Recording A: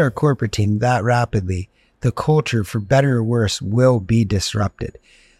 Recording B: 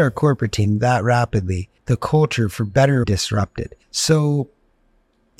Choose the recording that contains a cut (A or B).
B